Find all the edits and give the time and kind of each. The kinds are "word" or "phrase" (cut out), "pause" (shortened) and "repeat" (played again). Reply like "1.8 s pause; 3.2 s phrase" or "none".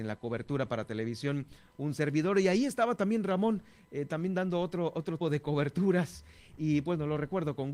5.2 s word